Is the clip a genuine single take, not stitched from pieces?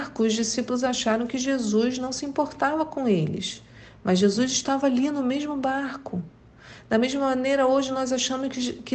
yes; 0 cuts

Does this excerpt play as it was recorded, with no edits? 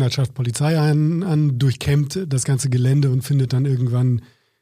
yes; 0 cuts

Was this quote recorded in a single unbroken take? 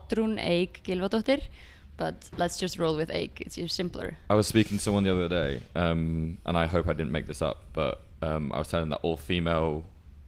yes; 0 cuts

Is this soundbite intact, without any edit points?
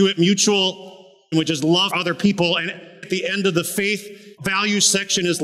no; 4 cuts; at 1.3 s, 1.9 s, 3.0 s, 4.4 s

